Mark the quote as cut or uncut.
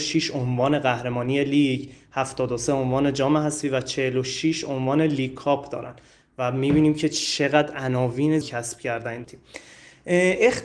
cut